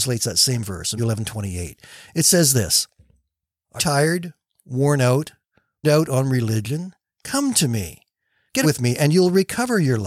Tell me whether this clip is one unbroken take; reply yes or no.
no